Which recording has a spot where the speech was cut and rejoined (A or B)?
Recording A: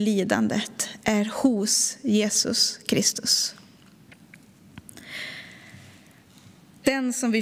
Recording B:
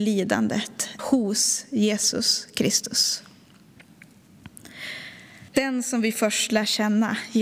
B